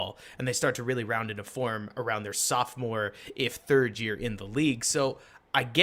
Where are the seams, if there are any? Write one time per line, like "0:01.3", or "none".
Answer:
none